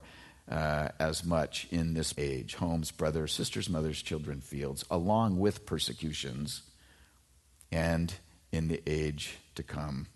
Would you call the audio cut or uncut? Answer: cut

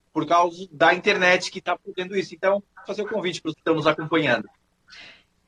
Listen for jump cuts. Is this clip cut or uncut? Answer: cut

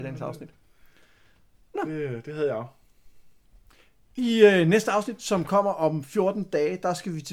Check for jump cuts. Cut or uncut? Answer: uncut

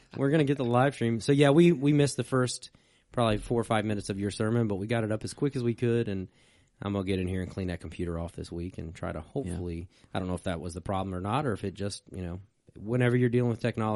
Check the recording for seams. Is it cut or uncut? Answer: uncut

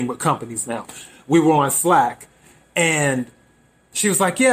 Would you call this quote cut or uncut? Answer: uncut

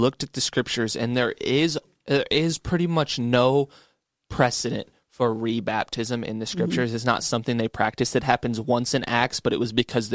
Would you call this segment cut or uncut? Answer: uncut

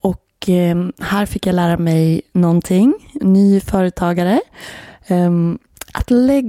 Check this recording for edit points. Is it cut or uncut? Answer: cut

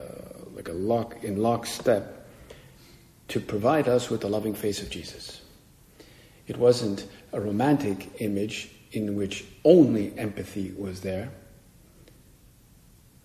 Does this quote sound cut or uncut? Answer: uncut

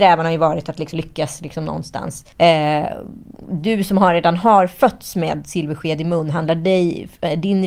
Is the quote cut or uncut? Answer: cut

